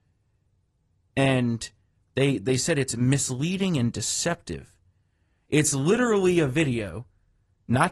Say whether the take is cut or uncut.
uncut